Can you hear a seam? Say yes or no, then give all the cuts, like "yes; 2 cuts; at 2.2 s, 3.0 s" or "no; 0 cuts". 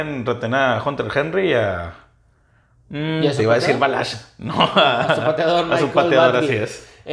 no; 0 cuts